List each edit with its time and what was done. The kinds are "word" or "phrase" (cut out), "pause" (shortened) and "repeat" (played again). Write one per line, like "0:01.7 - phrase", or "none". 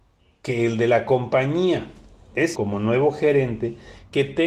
0:02.5 - word